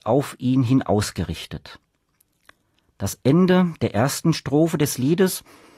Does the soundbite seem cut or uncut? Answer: uncut